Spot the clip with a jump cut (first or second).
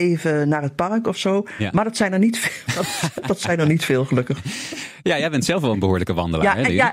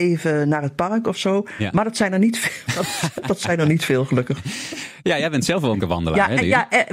second